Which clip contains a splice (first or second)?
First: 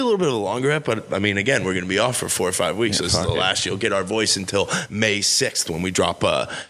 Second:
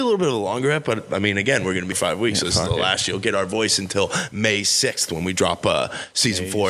second